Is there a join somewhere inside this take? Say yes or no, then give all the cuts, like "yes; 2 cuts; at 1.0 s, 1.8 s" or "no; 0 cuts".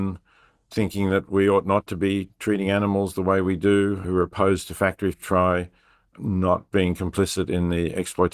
yes; 2 cuts; at 4.0 s, 5.1 s